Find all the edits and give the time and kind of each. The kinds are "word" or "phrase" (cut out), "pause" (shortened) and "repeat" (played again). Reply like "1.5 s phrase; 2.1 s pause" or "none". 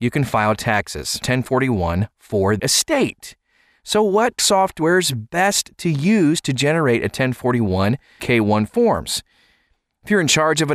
1.2 s word; 2.6 s word; 4.4 s word; 8.2 s word